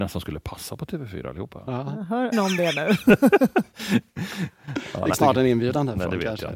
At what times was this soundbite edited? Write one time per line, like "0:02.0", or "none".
0:02.3
0:05.1